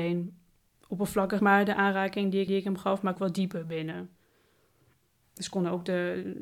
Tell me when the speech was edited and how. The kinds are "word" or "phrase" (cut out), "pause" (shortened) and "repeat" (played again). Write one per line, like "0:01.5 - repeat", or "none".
0:01.4 - word
0:02.5 - repeat
0:03.2 - phrase